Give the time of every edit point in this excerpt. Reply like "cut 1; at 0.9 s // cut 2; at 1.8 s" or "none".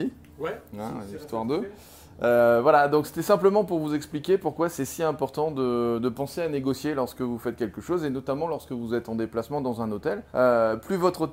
cut 1; at 10.3 s